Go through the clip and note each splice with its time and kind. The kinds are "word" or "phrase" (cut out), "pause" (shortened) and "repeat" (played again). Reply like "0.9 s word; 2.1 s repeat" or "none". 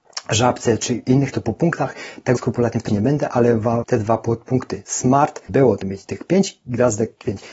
1.3 s word; 2.4 s word; 2.9 s word; 3.8 s word; 5.5 s word; 5.8 s word